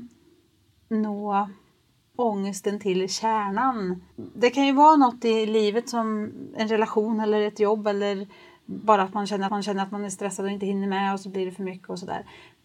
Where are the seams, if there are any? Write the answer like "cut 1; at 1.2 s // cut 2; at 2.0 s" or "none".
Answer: cut 1; at 2.1 s // cut 2; at 4.1 s // cut 3; at 9.5 s